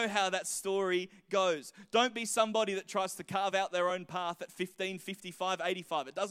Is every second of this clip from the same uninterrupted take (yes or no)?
yes